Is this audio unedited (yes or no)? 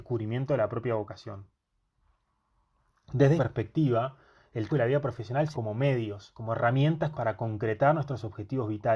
no